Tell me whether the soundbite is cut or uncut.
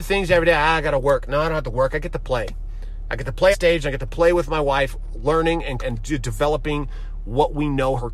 cut